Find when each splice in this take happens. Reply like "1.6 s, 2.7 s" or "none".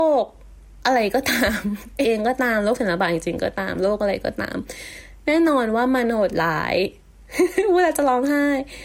2.0 s

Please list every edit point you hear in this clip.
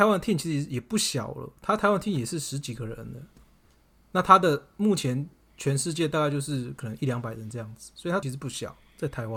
8.2 s

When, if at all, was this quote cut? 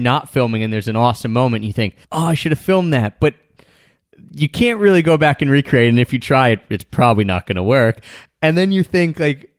2.0 s

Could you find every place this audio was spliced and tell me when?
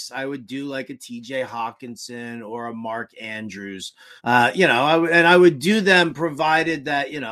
4.2 s

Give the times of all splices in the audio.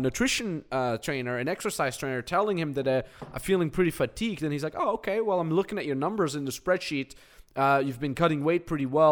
none

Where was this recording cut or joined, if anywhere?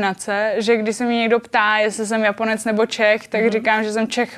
none

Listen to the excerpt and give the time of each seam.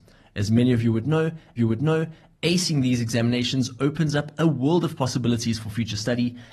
1.6 s

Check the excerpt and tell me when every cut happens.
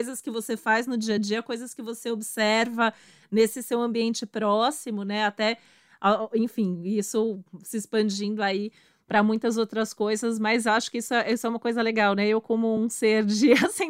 none

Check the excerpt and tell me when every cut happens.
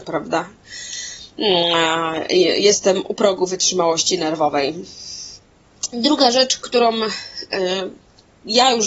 none

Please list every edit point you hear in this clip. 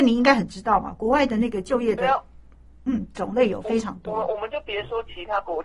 none

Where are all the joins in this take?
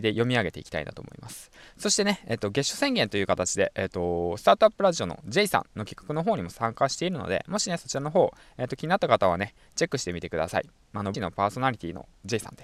11.1 s

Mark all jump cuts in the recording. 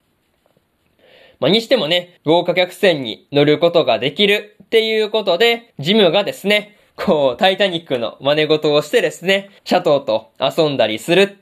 2.2 s, 5.7 s, 9.6 s

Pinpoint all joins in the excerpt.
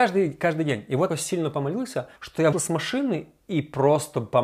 1.1 s, 2.2 s, 2.5 s

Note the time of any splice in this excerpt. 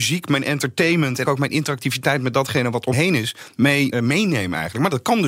1.2 s, 2.9 s, 3.9 s

